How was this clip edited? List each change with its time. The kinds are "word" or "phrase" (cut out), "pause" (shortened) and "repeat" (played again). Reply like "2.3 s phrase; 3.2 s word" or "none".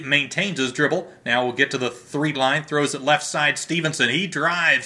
2.3 s word